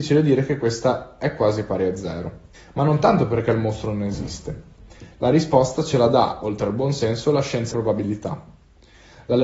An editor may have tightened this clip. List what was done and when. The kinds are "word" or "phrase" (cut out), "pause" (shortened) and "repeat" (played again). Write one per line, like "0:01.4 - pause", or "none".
0:02.5 - pause
0:07.7 - word